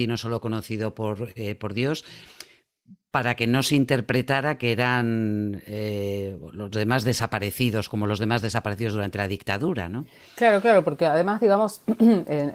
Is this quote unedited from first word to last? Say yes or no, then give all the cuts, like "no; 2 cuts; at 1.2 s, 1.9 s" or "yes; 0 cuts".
yes; 0 cuts